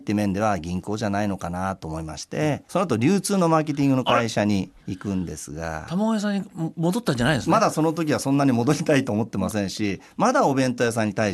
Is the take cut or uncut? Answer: cut